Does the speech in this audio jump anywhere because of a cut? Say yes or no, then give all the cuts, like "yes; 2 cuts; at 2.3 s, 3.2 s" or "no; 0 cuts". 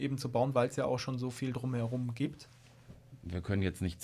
no; 0 cuts